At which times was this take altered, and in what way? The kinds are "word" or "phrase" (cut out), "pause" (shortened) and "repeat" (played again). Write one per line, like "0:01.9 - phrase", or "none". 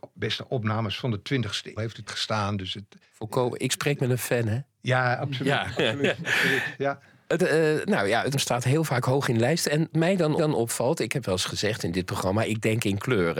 0:01.8 - word
0:02.1 - word
0:03.0 - pause
0:03.7 - word
0:04.7 - pause
0:07.4 - word
0:08.3 - word
0:09.9 - word
0:10.4 - repeat